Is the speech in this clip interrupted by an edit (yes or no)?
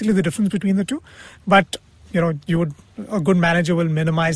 yes